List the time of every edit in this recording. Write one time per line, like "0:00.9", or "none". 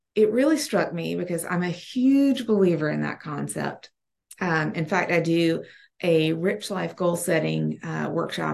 none